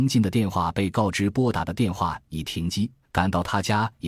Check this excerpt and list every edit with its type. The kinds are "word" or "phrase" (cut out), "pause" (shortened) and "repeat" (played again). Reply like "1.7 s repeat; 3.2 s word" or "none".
3.0 s pause